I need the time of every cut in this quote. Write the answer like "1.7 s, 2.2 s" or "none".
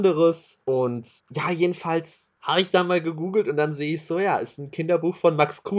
1.2 s